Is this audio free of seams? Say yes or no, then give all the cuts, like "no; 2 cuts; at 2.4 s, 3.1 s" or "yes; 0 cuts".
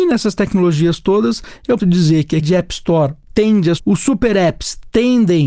no; 3 cuts; at 1.8 s, 2.4 s, 3.8 s